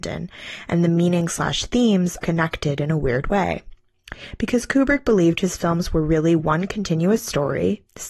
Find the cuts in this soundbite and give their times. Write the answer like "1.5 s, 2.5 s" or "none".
2.2 s